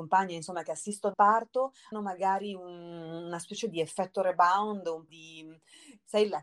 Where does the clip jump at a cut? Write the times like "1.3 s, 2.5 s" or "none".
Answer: 1.1 s, 1.9 s, 5.1 s